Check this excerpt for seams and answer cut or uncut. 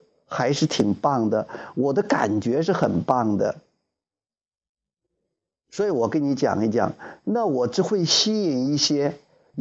uncut